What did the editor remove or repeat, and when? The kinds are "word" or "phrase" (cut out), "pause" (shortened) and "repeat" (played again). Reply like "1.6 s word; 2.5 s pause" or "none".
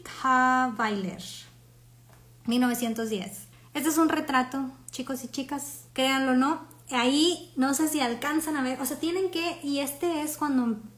3.5 s pause; 5.9 s pause